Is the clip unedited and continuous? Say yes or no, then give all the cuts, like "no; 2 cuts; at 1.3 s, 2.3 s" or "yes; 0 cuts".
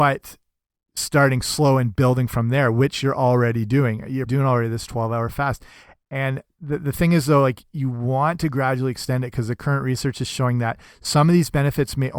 no; 1 cut; at 4.3 s